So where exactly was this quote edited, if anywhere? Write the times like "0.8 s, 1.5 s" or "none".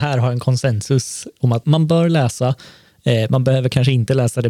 1.6 s